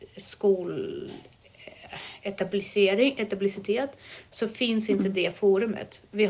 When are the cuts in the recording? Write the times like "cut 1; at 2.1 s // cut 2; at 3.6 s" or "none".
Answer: none